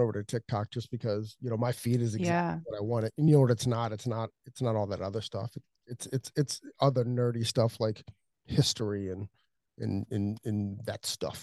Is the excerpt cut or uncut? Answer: uncut